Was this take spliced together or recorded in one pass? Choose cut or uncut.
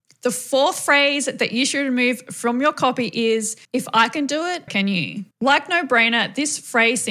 cut